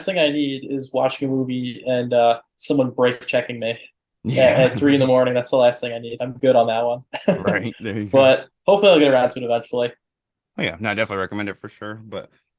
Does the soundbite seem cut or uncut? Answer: uncut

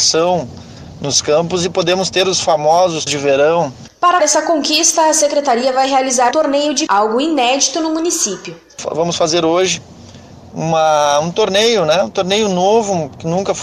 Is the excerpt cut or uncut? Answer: cut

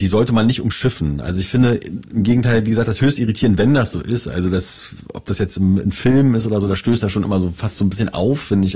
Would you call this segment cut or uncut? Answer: cut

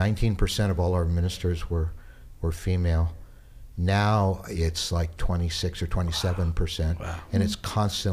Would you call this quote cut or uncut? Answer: uncut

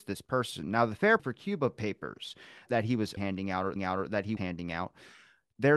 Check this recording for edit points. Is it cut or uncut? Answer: cut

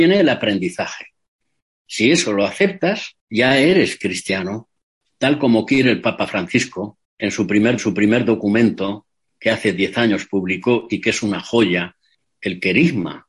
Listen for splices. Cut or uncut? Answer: cut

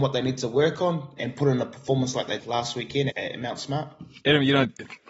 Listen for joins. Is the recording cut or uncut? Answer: cut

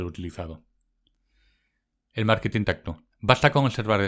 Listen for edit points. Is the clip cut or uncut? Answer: cut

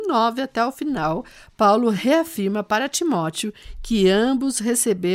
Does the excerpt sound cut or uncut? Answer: uncut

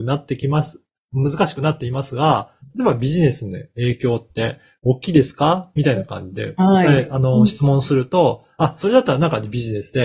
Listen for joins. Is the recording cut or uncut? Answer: uncut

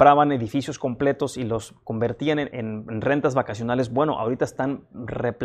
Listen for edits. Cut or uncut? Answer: cut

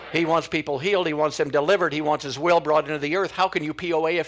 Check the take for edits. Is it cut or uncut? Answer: uncut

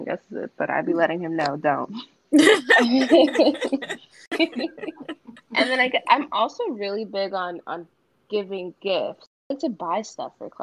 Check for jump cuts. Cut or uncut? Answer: uncut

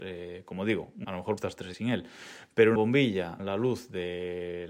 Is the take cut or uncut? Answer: cut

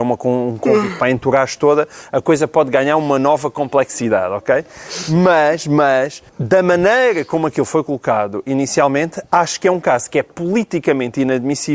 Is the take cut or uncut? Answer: cut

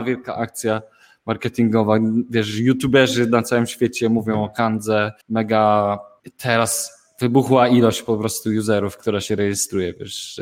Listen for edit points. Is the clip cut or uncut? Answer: cut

